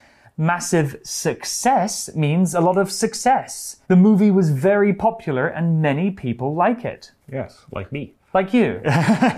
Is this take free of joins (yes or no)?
no